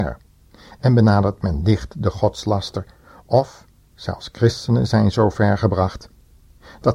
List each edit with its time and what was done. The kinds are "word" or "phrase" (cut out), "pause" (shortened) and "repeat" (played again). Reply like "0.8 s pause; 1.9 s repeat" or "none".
none